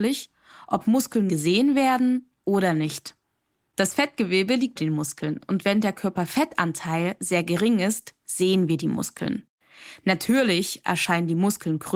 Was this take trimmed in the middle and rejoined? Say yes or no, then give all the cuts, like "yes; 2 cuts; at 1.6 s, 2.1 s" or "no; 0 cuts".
yes; 2 cuts; at 1.3 s, 4.8 s